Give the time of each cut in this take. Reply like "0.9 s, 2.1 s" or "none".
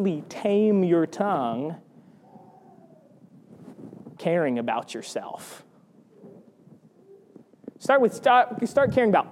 4.2 s